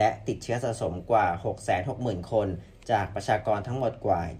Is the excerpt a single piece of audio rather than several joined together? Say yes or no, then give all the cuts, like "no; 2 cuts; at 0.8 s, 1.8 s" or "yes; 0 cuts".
yes; 0 cuts